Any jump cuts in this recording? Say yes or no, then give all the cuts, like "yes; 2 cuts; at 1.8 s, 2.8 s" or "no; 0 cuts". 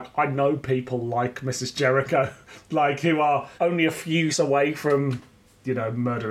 yes; 2 cuts; at 3.6 s, 4.3 s